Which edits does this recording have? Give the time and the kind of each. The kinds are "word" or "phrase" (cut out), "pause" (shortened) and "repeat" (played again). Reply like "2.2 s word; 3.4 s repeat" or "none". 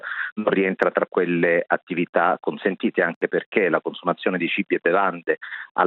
none